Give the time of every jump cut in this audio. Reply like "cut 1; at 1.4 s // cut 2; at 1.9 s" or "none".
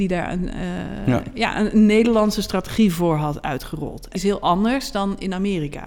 cut 1; at 4.2 s